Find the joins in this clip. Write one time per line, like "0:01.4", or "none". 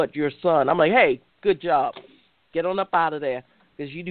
none